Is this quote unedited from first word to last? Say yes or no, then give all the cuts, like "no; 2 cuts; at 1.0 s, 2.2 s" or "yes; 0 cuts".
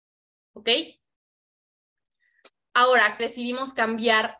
no; 1 cut; at 3.2 s